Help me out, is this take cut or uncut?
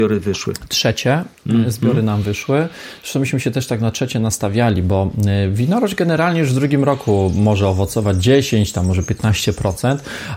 uncut